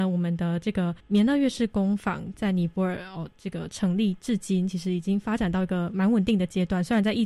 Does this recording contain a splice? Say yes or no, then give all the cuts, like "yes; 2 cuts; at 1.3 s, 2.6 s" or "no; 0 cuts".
yes; 1 cut; at 1.0 s